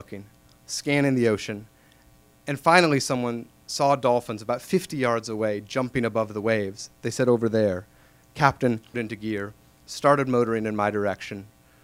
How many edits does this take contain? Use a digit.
1